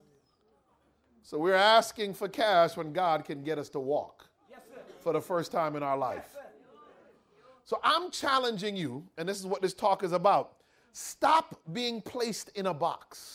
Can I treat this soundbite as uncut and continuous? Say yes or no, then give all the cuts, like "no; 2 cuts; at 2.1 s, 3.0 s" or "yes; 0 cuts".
yes; 0 cuts